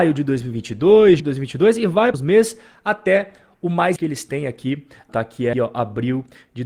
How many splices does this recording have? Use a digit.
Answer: 5